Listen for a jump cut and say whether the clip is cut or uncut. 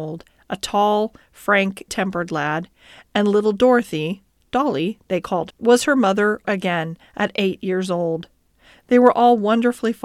cut